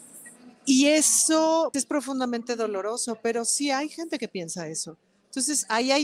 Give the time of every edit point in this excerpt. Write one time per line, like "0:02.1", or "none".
0:01.7